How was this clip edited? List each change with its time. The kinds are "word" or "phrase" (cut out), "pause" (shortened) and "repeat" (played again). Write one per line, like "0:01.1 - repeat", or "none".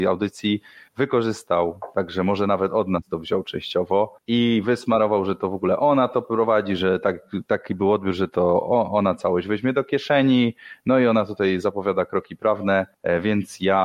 none